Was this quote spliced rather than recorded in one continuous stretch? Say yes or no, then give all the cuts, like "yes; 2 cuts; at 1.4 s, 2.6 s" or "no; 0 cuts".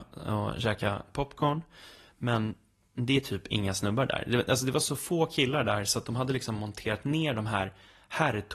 no; 0 cuts